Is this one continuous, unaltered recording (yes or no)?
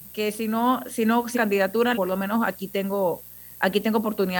no